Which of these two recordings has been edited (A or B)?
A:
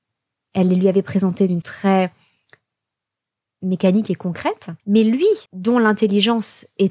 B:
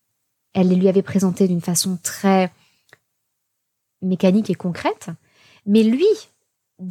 A